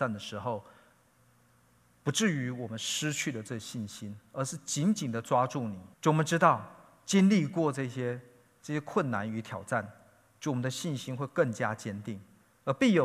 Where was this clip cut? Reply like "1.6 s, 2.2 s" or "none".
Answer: 5.9 s